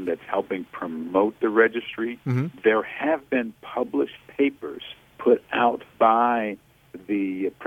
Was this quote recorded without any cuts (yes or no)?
no